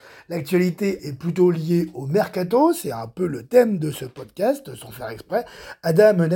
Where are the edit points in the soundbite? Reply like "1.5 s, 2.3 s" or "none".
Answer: 1.0 s

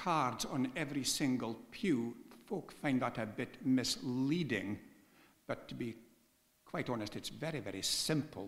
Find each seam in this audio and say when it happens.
none

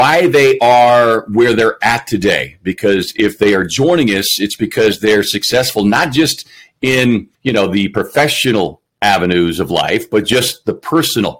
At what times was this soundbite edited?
7.3 s

